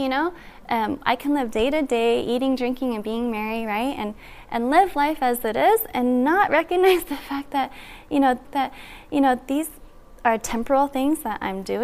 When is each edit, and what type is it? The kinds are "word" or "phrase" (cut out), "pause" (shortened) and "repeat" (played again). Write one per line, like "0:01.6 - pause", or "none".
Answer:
0:08.4 - repeat